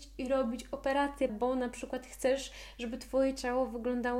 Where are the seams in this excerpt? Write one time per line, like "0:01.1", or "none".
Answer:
0:01.3